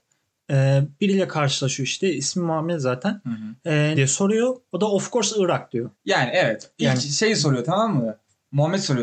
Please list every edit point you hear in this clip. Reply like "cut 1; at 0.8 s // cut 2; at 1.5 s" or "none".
cut 1; at 4.0 s // cut 2; at 5.9 s

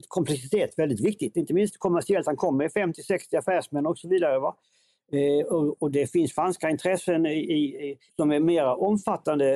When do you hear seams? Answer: cut 1; at 8.1 s

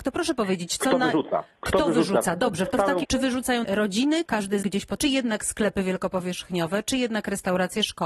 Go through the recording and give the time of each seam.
cut 1; at 3.0 s // cut 2; at 3.6 s // cut 3; at 4.3 s // cut 4; at 4.6 s // cut 5; at 5.0 s

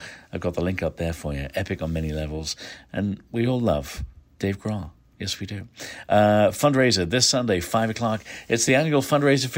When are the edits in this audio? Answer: none

